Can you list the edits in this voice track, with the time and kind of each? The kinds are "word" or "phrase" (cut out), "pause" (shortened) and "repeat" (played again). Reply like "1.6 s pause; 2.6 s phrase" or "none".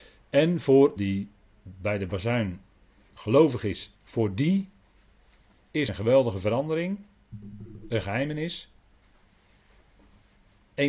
1.0 s phrase; 4.0 s phrase; 5.9 s word